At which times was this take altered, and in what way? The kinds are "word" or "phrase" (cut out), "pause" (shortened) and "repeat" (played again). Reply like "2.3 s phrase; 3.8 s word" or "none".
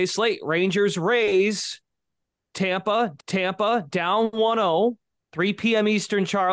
3.2 s repeat